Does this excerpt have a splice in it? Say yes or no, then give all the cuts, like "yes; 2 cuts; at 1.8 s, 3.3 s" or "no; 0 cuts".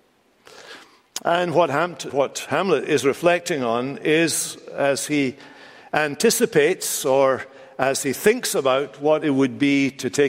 yes; 1 cut; at 2.1 s